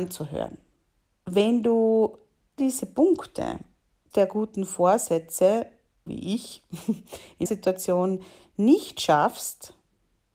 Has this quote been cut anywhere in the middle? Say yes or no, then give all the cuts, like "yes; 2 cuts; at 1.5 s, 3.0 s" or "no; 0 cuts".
yes; 4 cuts; at 2.6 s, 4.1 s, 6.1 s, 7.5 s